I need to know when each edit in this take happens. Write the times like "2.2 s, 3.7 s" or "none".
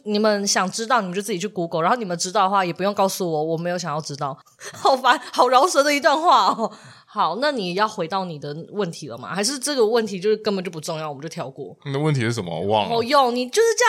4.4 s